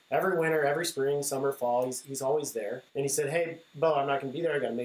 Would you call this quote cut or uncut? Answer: cut